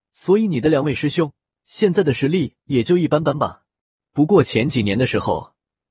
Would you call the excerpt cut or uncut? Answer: cut